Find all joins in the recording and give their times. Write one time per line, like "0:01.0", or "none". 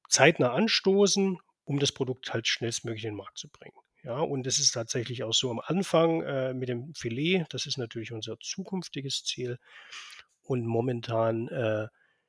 none